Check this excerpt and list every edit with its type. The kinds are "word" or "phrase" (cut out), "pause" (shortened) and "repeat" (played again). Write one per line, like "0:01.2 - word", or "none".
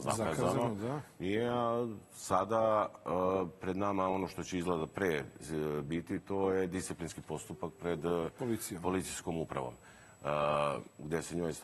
none